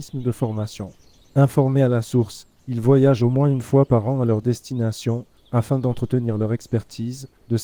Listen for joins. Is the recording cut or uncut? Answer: uncut